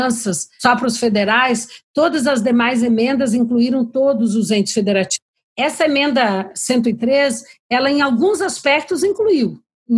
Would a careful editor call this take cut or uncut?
uncut